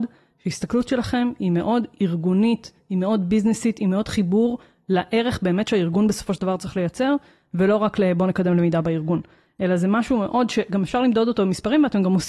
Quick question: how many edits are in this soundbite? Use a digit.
0